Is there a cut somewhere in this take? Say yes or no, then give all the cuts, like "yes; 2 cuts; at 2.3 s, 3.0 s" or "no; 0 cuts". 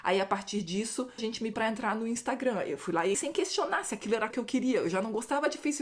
yes; 4 cuts; at 1.2 s, 1.5 s, 3.1 s, 4.3 s